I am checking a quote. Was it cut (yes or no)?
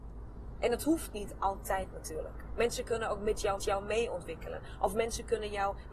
yes